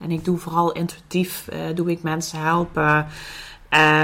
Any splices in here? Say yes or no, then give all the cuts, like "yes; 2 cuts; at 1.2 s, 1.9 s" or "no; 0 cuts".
no; 0 cuts